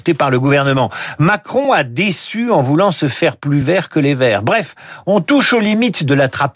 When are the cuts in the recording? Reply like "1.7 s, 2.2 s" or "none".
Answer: none